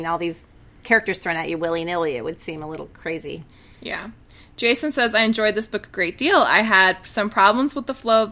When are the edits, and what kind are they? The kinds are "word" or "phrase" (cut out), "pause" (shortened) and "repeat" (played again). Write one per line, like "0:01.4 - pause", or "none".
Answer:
none